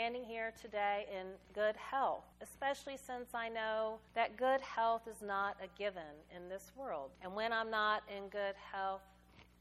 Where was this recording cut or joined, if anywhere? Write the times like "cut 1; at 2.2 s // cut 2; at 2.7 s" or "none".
cut 1; at 2.3 s // cut 2; at 4.1 s // cut 3; at 7.1 s